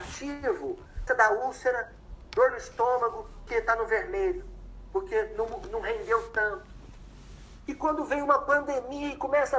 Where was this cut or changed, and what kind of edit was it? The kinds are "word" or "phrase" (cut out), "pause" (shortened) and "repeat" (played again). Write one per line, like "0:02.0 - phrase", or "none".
0:01.1 - word
0:03.5 - word